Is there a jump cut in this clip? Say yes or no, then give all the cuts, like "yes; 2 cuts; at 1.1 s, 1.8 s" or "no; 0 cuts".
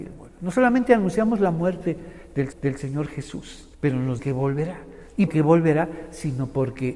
yes; 4 cuts; at 2.5 s, 3.7 s, 4.2 s, 5.3 s